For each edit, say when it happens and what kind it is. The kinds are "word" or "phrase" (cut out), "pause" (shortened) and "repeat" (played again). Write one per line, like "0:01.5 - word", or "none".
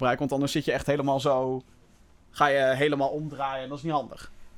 none